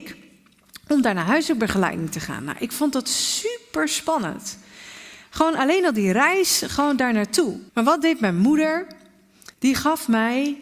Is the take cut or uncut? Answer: cut